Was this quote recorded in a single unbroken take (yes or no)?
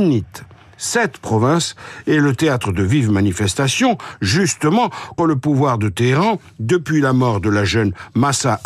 no